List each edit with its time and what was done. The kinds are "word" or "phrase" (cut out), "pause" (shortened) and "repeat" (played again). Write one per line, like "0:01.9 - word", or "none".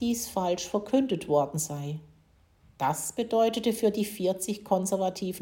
none

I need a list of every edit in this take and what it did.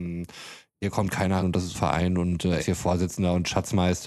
0:01.4 - word
0:01.7 - word
0:02.6 - word

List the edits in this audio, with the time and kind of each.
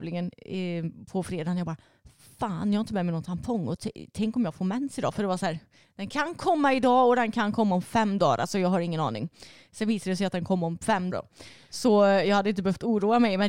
0:11.1 - word

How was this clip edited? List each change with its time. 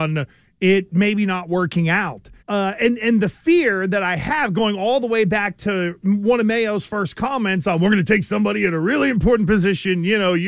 0:02.4 - pause

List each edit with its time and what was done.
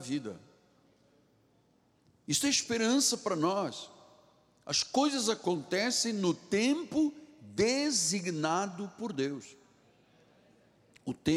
none

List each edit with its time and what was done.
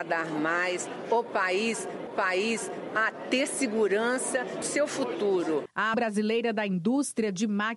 0:02.1 - repeat
0:04.6 - word
0:05.9 - word

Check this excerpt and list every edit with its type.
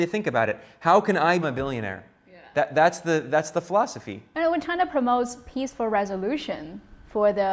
0:01.4 - word

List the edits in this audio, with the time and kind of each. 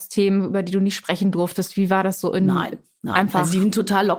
none

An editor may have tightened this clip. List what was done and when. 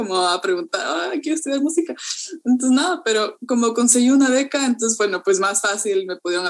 none

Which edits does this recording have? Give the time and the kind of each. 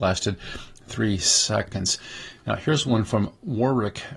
none

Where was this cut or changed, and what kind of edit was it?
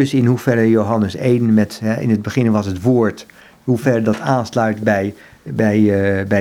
none

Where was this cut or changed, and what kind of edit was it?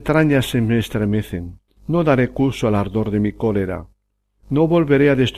0:01.7 - pause

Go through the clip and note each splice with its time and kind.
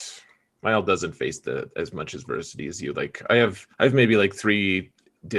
0:03.7 - pause

